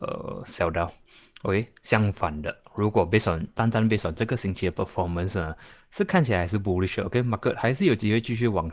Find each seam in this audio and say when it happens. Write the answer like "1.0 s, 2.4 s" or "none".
none

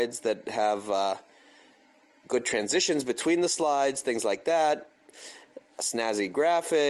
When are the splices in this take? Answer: none

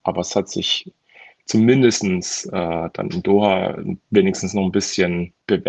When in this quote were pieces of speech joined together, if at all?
none

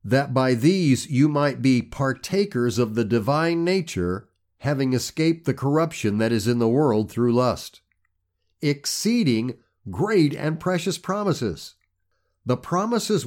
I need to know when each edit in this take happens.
none

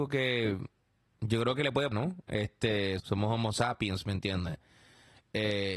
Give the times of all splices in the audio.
1.9 s, 3.0 s

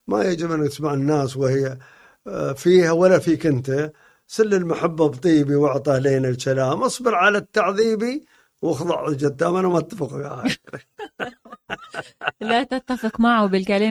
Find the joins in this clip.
none

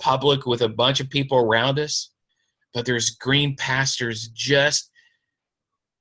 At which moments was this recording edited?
none

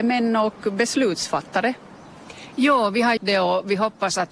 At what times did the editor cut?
3.2 s

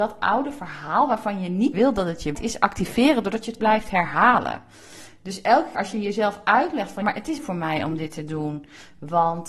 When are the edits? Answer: 1.7 s, 2.3 s, 3.6 s, 5.7 s, 7.0 s, 7.4 s

